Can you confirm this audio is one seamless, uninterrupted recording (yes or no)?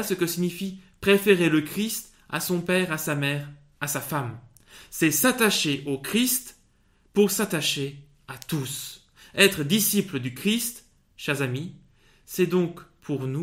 yes